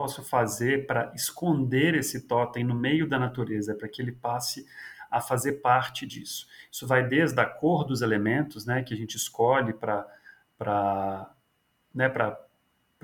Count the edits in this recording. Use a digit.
0